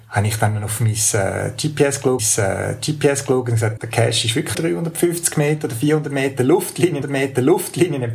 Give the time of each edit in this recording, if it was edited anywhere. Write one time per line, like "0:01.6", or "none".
0:02.2
0:03.8
0:04.5
0:07.0